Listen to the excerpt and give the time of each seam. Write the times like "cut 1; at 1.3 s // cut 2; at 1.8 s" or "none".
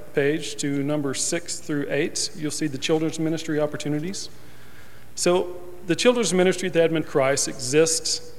cut 1; at 7.0 s